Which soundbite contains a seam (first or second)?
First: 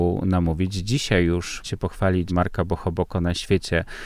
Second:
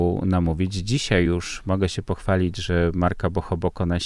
first